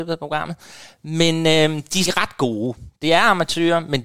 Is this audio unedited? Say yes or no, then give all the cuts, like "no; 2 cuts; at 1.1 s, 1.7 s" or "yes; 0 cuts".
no; 1 cut; at 2.1 s